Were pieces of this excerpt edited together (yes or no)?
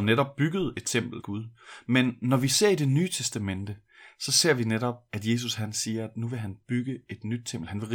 yes